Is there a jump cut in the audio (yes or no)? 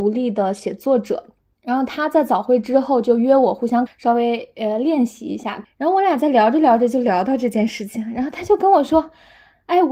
yes